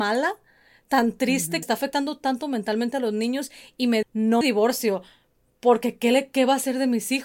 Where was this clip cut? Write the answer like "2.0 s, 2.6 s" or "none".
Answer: 1.6 s, 4.0 s, 4.4 s